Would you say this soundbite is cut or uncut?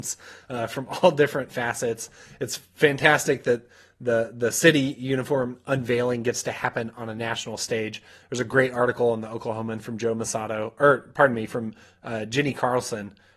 uncut